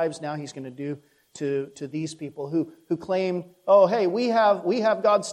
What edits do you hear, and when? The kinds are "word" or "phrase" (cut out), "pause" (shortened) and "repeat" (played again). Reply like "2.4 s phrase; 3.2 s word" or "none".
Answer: none

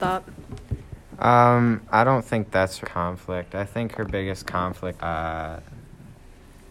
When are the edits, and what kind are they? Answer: 2.8 s word; 5.0 s phrase

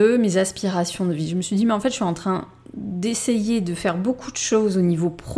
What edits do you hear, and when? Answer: none

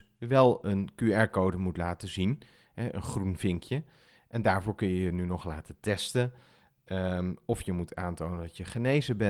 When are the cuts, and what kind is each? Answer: none

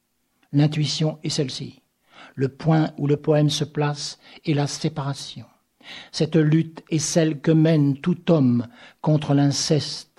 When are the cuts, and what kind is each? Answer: none

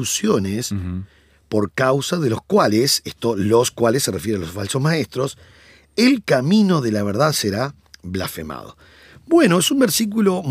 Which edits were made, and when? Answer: none

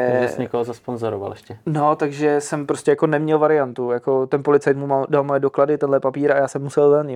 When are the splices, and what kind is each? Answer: none

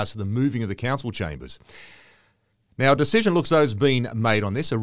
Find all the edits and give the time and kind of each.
none

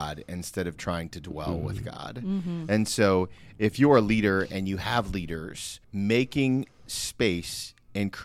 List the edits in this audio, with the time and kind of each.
5.8 s pause

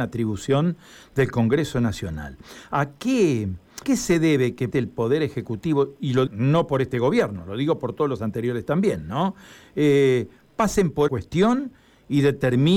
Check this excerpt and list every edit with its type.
3.8 s word; 4.7 s word; 6.3 s word; 11.1 s phrase

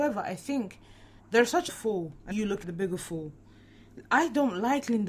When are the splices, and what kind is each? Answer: 1.2 s pause; 1.7 s phrase; 2.3 s word; 2.6 s word

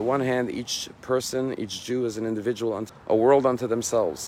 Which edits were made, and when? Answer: 2.9 s word

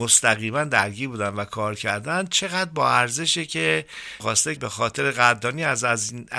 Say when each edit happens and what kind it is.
4.2 s word; 4.6 s word

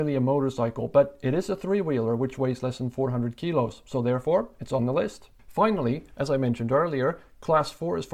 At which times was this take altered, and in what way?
5.4 s pause

